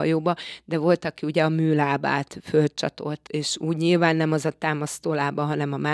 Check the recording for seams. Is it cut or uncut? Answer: cut